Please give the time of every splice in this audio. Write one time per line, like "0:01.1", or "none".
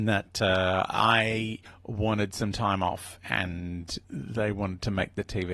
0:01.7
0:04.0